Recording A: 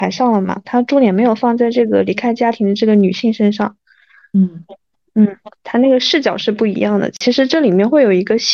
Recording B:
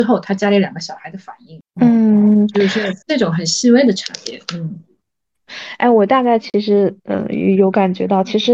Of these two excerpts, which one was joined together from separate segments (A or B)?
B